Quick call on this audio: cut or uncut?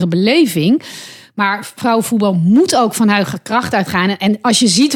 uncut